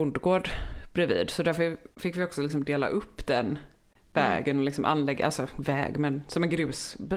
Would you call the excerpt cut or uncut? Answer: uncut